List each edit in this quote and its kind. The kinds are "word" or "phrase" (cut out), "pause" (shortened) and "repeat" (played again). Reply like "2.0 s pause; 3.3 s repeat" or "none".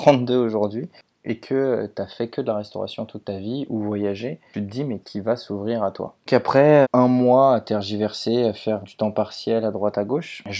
5.0 s word; 6.3 s word; 6.8 s word; 8.8 s word